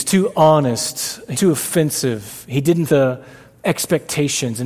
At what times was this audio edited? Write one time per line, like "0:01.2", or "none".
0:01.3
0:02.9